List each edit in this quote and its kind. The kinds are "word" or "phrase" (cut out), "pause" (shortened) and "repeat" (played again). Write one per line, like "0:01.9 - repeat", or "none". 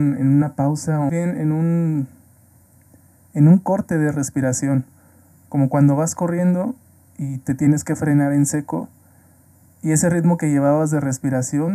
0:01.1 - word